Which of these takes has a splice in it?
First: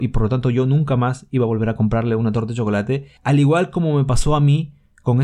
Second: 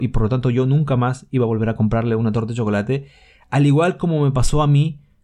first; 1 cut; at 3.2 s

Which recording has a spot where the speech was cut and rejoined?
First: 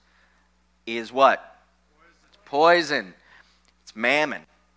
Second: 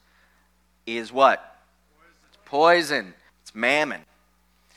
second; 1 cut; at 3.3 s

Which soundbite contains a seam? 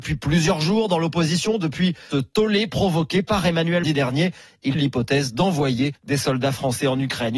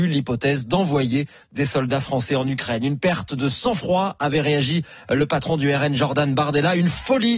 first; 4 cuts; at 2.1 s, 3.8 s, 4.7 s, 6.0 s

